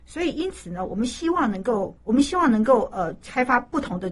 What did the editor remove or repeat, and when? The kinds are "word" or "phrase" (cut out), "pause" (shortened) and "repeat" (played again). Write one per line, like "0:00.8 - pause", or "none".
0:02.0 - pause